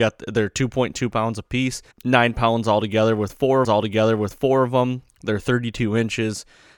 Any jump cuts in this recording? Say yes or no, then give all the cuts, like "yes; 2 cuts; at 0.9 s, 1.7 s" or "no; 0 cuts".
yes; 2 cuts; at 1.9 s, 3.6 s